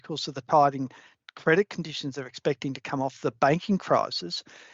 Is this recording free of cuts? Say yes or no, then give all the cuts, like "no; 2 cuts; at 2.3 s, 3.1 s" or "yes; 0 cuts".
yes; 0 cuts